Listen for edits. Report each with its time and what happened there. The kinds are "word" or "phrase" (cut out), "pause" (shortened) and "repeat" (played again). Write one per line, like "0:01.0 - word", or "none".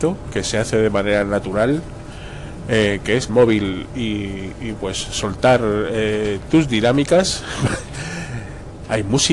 0:03.3 - phrase
0:04.7 - word